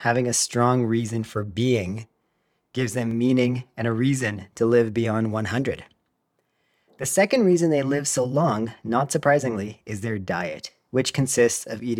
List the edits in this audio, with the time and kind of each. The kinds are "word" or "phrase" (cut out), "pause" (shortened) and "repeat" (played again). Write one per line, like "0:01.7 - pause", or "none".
none